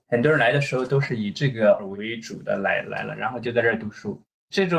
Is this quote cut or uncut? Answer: cut